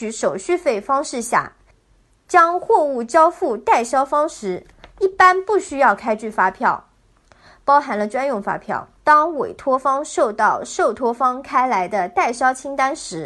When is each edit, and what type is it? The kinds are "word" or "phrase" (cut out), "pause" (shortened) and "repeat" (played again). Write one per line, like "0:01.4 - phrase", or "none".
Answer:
0:09.0 - pause